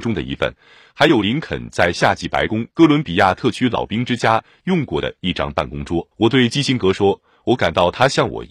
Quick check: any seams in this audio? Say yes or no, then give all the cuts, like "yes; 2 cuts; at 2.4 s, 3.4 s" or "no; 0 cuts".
yes; 2 cuts; at 2.7 s, 6.1 s